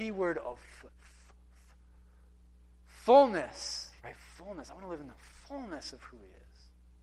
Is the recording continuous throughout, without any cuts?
no; 1 cut; at 4.0 s

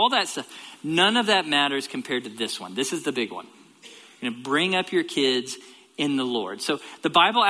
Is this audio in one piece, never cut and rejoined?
yes; 0 cuts

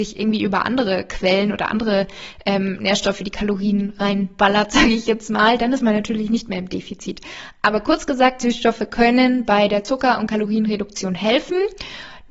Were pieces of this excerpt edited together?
no; 0 cuts

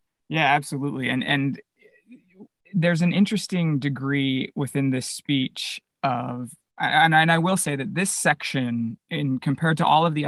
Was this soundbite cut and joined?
no; 0 cuts

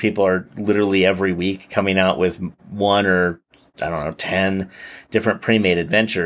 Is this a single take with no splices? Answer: yes; 0 cuts

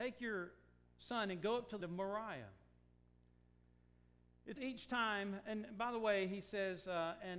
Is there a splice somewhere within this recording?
yes; 2 cuts; at 1.8 s, 4.6 s

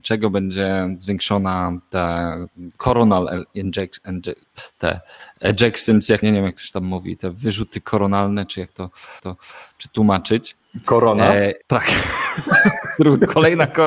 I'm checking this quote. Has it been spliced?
yes; 4 cuts; at 2.8 s, 6.2 s, 9.2 s, 11.6 s

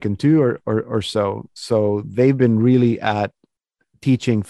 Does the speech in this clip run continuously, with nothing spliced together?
yes; 0 cuts

